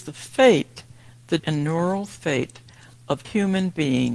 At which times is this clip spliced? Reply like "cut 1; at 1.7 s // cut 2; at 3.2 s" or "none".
cut 1; at 1.4 s // cut 2; at 3.2 s